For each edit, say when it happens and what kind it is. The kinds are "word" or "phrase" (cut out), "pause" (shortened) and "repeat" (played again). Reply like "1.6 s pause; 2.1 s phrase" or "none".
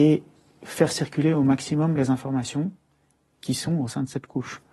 none